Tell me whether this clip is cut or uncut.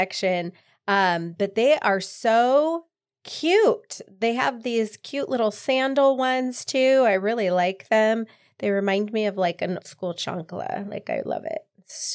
cut